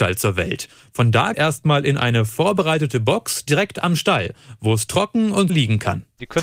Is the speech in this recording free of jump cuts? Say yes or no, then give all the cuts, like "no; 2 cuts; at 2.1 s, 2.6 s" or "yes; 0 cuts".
no; 2 cuts; at 1.3 s, 5.5 s